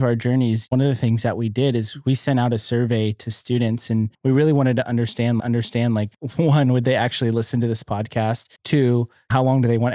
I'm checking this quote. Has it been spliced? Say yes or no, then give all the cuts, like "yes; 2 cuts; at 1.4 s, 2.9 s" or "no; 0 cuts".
yes; 3 cuts; at 4.1 s, 5.4 s, 8.6 s